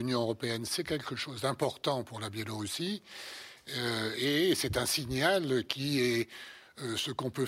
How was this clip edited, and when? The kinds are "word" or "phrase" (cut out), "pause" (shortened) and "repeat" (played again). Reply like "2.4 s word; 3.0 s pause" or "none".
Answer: none

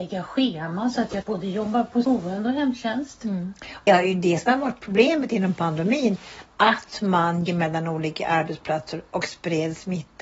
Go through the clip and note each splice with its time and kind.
1.2 s word; 2.0 s word; 3.9 s word; 7.5 s word

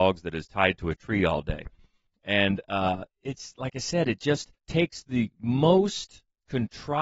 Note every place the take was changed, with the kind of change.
3.1 s pause; 4.6 s pause

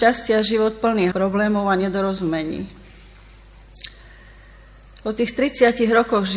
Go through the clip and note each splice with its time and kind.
1.1 s word

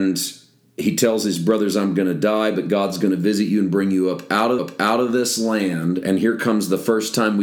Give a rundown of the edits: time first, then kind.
4.6 s repeat

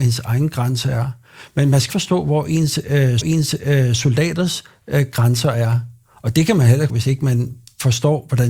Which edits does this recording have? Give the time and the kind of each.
1.9 s word; 3.2 s repeat; 6.9 s word

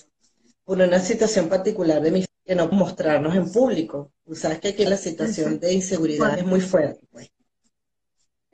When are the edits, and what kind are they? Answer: 2.3 s word; 2.7 s word; 4.9 s word; 6.3 s word

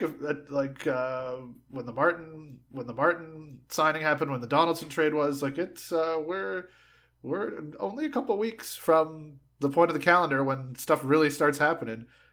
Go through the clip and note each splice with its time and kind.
2.6 s repeat

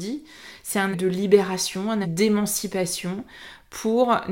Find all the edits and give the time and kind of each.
0.9 s word; 2.0 s word

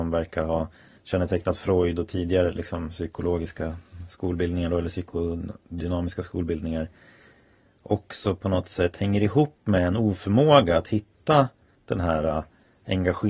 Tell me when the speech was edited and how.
none

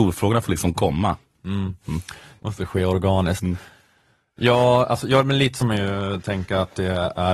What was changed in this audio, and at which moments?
5.6 s word

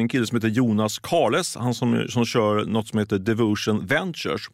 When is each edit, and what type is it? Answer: none

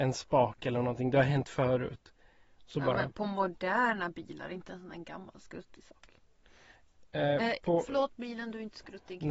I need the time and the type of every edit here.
none

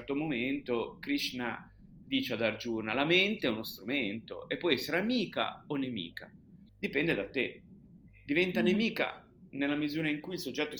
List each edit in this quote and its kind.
2.0 s word; 6.7 s pause

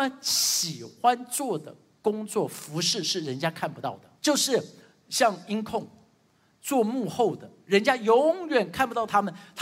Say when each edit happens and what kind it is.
4.2 s pause

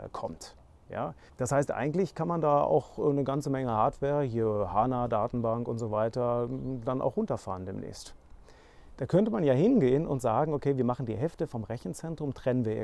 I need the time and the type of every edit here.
1.3 s pause

